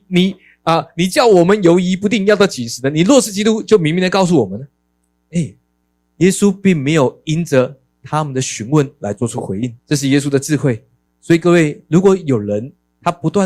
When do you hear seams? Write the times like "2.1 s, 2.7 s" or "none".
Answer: 5.8 s, 9.8 s, 11.1 s